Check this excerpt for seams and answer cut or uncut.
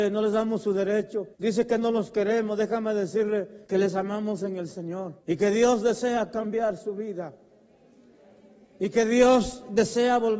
cut